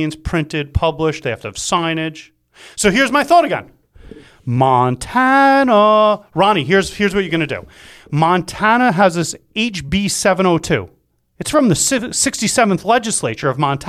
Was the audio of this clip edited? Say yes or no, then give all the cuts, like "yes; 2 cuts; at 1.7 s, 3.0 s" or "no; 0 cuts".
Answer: no; 0 cuts